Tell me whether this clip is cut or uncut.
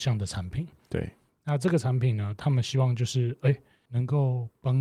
uncut